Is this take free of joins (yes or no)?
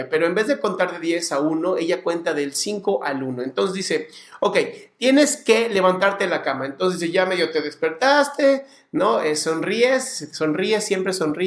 yes